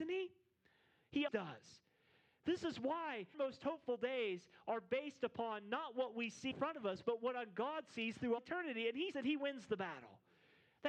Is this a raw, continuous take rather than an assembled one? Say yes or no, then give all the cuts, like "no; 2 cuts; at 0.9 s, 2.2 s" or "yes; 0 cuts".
no; 5 cuts; at 1.3 s, 3.3 s, 6.5 s, 8.4 s, 9.1 s